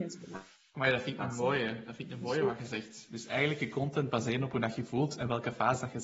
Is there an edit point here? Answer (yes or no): no